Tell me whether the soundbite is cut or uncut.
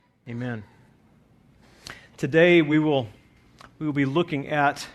uncut